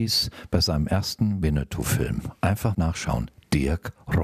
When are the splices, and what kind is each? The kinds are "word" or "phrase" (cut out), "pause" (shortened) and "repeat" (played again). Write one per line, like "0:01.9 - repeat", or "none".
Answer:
0:02.7 - phrase